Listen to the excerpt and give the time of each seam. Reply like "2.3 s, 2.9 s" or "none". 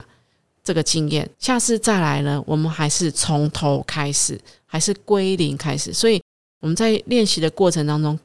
1.3 s